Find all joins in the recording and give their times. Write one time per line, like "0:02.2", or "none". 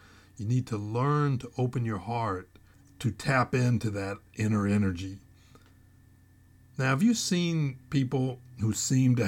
none